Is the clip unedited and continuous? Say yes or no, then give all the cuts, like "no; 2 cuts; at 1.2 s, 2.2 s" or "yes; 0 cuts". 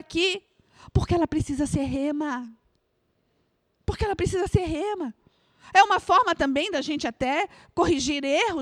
yes; 0 cuts